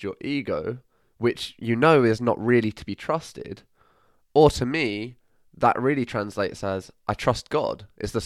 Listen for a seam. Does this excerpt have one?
no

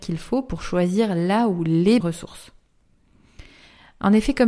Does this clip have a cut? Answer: yes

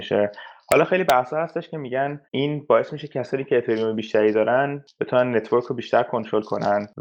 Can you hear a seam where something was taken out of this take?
yes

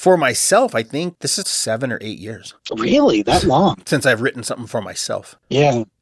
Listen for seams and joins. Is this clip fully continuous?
no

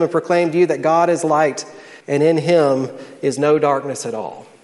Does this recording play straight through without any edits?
no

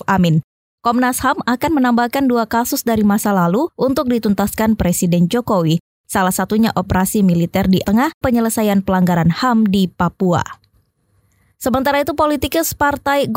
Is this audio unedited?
no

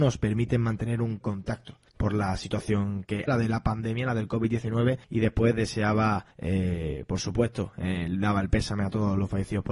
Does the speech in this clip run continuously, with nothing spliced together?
no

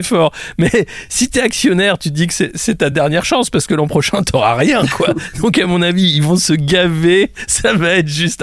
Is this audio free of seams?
yes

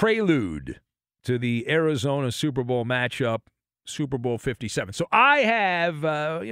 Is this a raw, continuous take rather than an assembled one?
yes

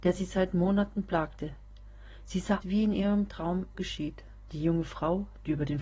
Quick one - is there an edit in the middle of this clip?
yes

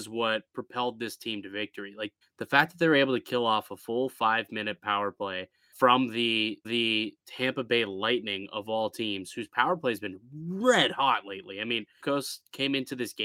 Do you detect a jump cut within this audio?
yes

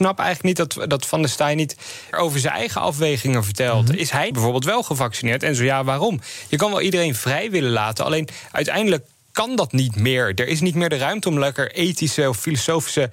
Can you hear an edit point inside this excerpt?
yes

